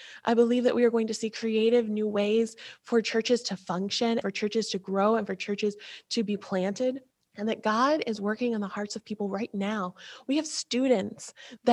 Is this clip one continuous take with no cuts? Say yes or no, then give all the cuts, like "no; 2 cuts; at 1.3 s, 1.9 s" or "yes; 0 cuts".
no; 2 cuts; at 4.2 s, 7.1 s